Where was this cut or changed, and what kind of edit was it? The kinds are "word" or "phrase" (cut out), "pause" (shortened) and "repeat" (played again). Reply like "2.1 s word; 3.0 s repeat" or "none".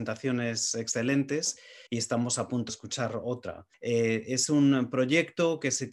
1.9 s pause; 2.7 s word; 3.7 s pause